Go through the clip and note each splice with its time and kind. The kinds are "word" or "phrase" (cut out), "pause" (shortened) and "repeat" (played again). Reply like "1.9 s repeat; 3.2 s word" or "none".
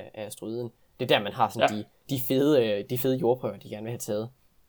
2.0 s word